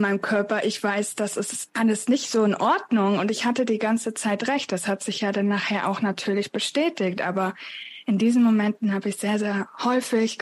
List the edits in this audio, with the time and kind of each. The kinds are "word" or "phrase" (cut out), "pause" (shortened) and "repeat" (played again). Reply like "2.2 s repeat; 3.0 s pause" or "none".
none